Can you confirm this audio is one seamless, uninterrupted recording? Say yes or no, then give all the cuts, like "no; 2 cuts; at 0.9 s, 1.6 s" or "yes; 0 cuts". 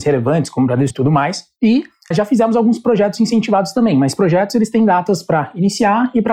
no; 2 cuts; at 0.9 s, 2.1 s